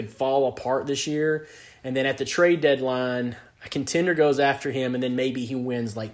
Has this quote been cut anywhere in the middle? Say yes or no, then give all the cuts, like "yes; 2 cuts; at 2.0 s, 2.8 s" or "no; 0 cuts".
no; 0 cuts